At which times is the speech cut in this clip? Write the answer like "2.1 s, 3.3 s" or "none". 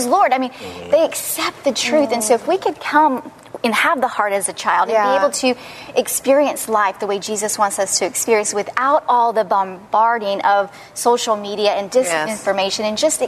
none